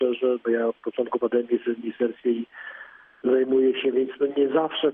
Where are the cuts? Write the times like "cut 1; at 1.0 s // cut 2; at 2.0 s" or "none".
none